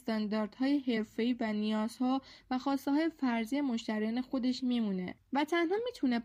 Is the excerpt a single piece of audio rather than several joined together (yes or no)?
yes